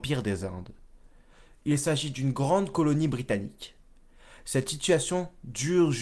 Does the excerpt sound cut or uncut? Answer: uncut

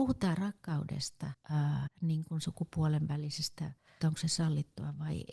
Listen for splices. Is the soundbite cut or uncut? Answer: cut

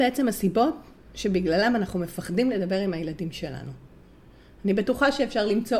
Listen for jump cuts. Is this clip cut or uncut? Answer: uncut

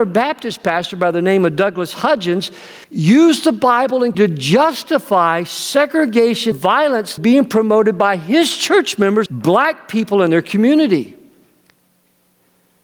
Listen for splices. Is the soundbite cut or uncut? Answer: cut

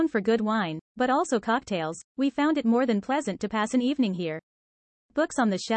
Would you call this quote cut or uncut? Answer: uncut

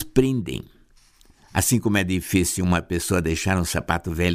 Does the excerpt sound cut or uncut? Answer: uncut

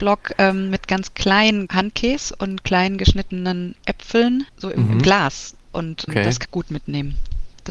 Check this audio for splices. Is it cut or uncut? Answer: cut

